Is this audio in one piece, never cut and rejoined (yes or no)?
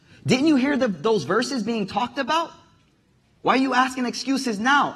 yes